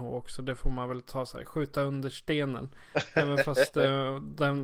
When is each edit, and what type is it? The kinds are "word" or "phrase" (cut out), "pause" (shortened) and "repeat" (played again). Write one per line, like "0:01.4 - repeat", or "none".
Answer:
none